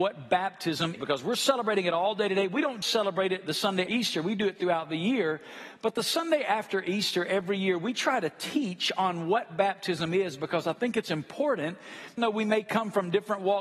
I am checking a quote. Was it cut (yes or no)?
yes